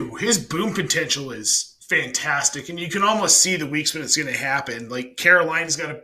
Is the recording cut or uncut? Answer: uncut